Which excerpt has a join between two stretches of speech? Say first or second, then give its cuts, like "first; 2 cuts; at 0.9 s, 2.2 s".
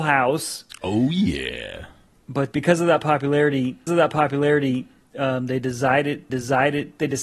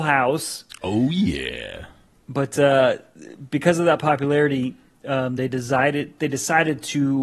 first; 3 cuts; at 2.5 s, 3.9 s, 6.3 s